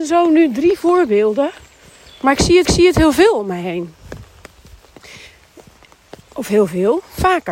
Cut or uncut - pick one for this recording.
cut